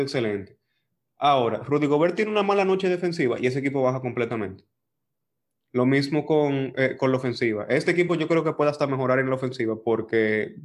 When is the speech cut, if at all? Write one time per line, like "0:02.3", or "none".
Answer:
none